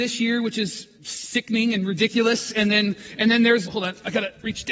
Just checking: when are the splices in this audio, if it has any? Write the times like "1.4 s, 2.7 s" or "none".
1.0 s, 3.6 s